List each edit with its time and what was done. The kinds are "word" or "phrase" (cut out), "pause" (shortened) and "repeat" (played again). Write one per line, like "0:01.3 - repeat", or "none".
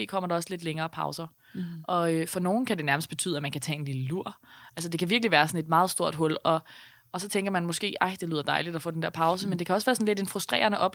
none